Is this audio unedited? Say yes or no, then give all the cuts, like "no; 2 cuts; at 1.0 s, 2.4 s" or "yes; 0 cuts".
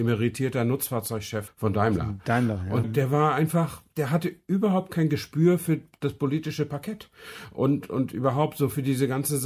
no; 3 cuts; at 1.5 s, 2.8 s, 3.9 s